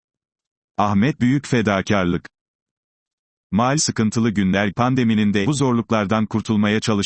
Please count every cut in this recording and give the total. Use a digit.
4